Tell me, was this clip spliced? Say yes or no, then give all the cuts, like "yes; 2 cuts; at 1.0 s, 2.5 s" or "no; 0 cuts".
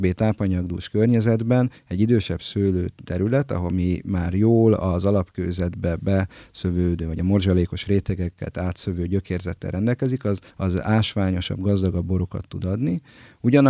yes; 1 cut; at 10.5 s